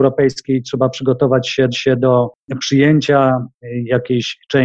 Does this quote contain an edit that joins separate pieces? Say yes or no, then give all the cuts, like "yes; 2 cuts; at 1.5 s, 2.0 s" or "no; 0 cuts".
yes; 1 cut; at 1.7 s